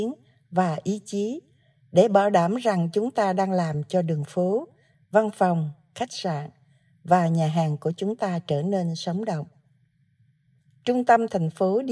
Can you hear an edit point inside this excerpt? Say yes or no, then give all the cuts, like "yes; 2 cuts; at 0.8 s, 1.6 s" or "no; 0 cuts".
no; 0 cuts